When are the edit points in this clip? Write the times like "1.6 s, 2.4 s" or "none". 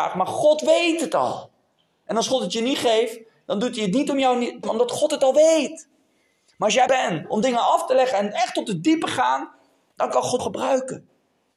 4.6 s, 6.9 s, 10.4 s